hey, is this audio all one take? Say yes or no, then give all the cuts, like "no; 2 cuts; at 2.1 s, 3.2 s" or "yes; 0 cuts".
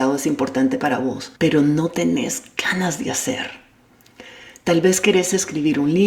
no; 1 cut; at 1.4 s